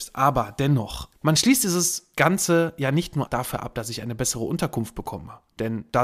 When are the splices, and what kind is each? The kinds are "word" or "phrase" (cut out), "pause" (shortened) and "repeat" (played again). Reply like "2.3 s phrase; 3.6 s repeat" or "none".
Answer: 3.3 s word